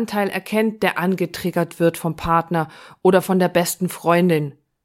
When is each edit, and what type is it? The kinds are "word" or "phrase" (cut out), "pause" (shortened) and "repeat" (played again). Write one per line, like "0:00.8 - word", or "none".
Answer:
none